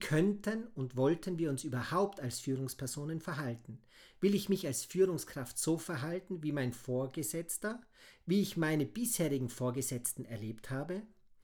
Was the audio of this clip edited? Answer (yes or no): no